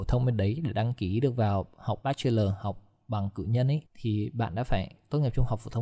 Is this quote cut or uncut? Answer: cut